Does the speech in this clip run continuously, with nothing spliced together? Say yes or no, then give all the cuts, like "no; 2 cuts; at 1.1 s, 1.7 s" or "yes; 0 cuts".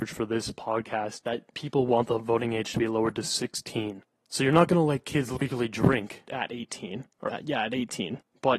no; 2 cuts; at 6.2 s, 7.3 s